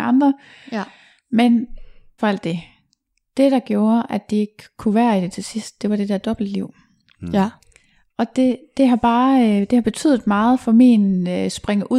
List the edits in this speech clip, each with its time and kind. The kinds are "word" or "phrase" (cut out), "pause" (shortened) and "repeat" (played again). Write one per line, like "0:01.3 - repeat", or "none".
0:02.2 - word